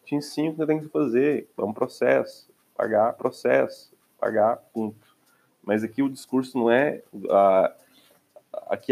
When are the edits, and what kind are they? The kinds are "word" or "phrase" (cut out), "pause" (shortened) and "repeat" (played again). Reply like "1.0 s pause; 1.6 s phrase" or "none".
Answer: 3.2 s repeat